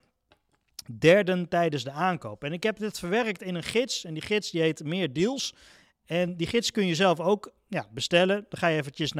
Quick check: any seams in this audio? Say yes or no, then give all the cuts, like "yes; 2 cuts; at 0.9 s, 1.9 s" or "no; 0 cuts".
no; 0 cuts